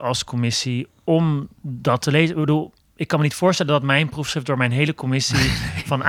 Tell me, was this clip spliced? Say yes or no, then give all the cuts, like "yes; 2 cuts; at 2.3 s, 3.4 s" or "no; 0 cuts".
no; 0 cuts